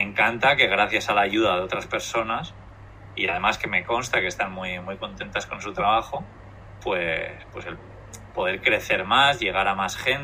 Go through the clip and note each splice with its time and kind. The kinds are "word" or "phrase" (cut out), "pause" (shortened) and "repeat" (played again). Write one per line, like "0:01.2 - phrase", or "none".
none